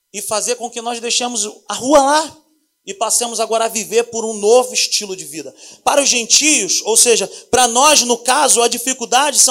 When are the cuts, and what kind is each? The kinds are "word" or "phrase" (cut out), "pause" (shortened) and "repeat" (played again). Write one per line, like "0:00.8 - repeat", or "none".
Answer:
none